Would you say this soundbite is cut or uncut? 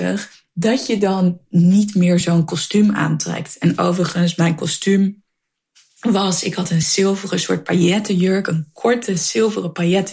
uncut